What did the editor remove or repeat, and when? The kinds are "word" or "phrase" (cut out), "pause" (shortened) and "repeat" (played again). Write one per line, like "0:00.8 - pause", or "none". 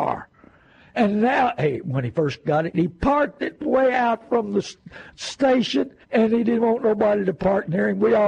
0:06.0 - pause